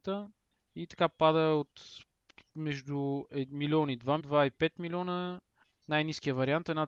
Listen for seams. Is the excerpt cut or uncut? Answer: cut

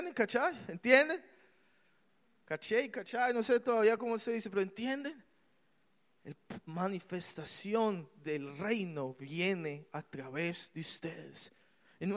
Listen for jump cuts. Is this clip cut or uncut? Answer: uncut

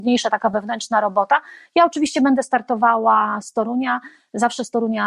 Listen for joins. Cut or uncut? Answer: uncut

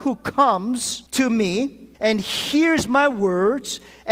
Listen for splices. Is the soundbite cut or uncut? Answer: cut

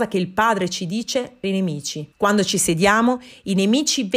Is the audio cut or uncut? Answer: cut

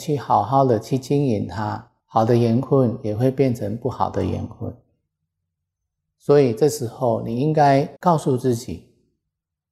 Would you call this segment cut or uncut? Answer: cut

